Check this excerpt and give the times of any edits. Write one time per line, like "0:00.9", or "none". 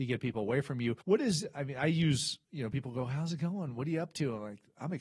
0:01.0
0:02.4